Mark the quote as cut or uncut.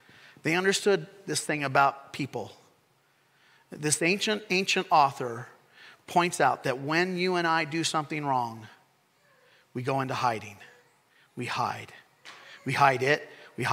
uncut